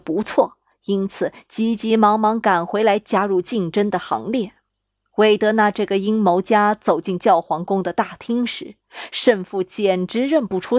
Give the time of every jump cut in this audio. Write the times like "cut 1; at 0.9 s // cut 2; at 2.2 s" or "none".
cut 1; at 4.7 s